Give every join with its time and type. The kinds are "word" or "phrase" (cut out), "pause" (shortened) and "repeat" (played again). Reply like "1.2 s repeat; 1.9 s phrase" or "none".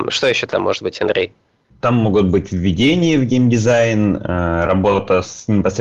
none